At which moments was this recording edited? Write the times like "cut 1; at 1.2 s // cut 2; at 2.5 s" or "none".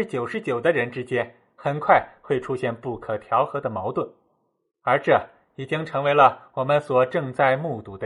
none